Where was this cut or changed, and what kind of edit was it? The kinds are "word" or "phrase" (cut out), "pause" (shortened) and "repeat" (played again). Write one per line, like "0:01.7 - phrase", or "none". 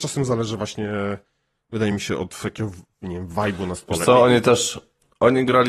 none